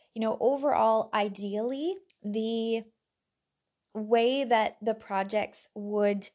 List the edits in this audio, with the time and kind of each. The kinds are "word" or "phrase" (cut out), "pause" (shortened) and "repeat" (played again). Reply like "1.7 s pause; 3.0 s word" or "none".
2.1 s pause